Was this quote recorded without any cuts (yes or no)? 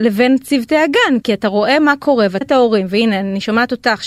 no